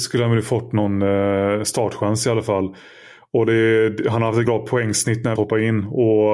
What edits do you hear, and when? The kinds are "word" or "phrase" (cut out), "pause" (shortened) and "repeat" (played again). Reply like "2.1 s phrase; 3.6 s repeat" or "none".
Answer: 4.5 s word; 5.4 s phrase